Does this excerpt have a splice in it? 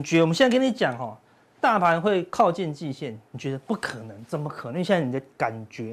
no; 0 cuts

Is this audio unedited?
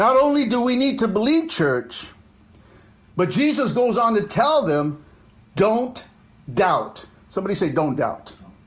yes; 0 cuts

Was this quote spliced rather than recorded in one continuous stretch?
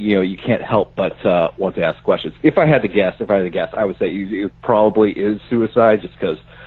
no; 0 cuts

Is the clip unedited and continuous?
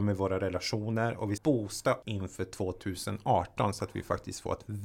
no; 2 cuts; at 1.4 s, 2.0 s

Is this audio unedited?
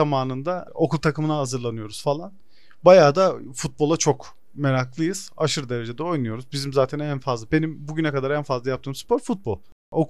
yes; 0 cuts

